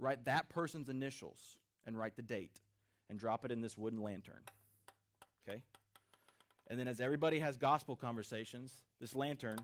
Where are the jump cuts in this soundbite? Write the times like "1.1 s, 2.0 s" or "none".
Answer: none